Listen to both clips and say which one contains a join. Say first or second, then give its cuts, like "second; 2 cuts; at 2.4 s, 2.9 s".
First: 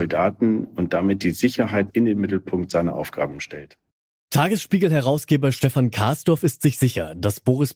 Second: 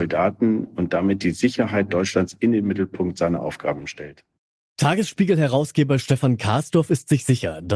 first; 1 cut; at 1.9 s